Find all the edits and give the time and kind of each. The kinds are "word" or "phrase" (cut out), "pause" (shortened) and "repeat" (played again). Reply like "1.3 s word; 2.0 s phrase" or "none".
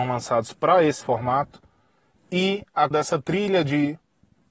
1.0 s word; 2.9 s word